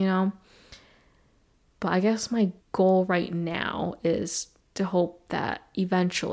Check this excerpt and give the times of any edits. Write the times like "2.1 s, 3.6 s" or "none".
2.6 s, 4.6 s

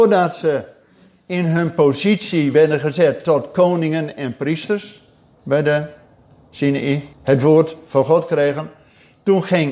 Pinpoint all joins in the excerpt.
7.1 s

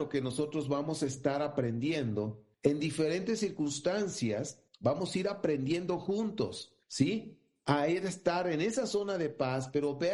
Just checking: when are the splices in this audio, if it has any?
2.5 s, 4.7 s, 6.8 s

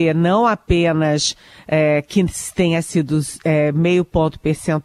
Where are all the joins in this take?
none

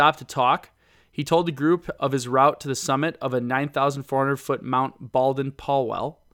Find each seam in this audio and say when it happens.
none

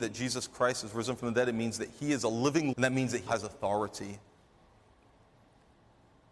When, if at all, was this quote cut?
2.7 s, 3.3 s

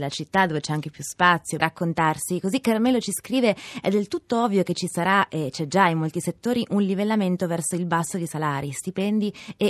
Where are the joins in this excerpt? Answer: 1.6 s

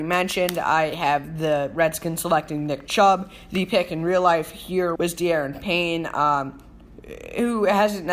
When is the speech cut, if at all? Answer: 5.0 s

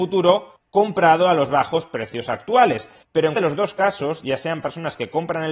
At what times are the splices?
1.5 s, 3.4 s

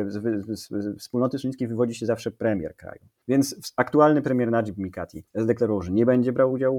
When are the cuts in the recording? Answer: 5.3 s

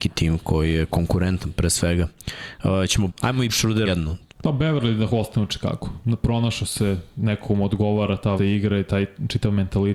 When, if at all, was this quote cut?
3.1 s, 3.5 s, 3.8 s, 4.3 s, 8.4 s

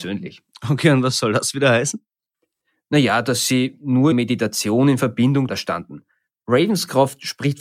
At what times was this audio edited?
4.1 s, 5.5 s

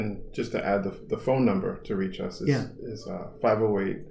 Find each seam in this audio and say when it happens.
none

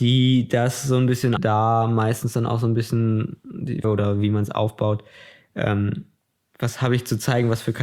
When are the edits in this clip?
1.4 s, 3.8 s

